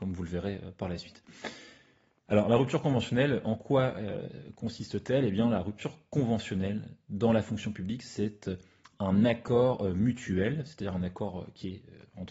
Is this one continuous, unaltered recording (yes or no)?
yes